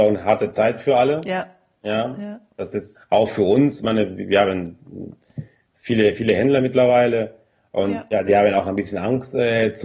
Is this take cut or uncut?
cut